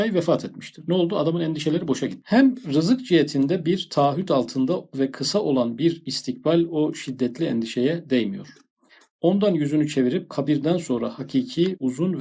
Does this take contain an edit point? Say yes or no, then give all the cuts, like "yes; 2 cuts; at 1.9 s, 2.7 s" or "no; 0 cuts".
no; 0 cuts